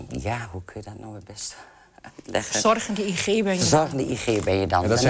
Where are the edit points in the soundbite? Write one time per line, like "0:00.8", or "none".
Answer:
none